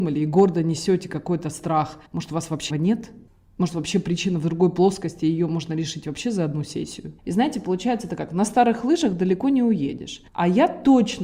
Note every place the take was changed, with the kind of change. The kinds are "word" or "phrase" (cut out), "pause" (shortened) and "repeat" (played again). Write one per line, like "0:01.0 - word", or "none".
0:02.1 - pause
0:02.7 - word
0:07.2 - pause
0:10.3 - pause